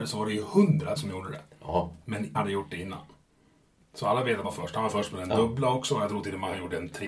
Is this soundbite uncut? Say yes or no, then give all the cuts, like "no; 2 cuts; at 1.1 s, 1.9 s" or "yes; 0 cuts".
no; 3 cuts; at 1.0 s, 2.3 s, 4.4 s